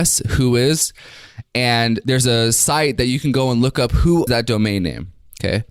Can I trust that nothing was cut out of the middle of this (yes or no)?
no